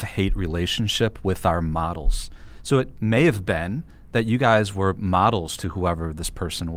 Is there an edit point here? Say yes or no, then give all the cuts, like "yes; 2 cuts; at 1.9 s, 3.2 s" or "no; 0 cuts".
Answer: no; 0 cuts